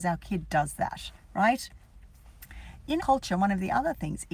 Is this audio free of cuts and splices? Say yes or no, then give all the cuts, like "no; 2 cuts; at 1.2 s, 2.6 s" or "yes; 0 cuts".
no; 1 cut; at 3.0 s